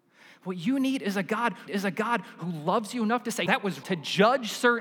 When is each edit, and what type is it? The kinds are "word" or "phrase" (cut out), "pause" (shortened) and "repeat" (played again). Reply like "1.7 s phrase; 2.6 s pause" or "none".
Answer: 1.7 s repeat; 3.5 s word; 3.8 s word